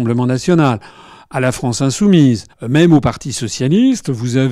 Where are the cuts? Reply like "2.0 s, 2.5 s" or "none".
2.5 s